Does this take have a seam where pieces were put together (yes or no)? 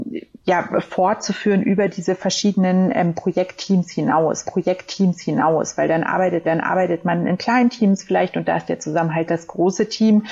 yes